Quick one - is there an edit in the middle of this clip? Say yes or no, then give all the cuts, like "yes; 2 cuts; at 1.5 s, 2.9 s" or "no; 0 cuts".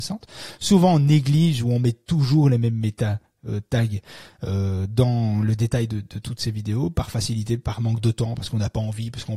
no; 0 cuts